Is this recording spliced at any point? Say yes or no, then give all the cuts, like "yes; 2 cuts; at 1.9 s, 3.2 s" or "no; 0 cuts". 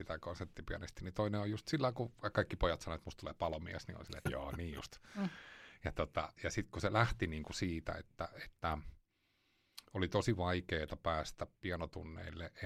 yes; 1 cut; at 4.3 s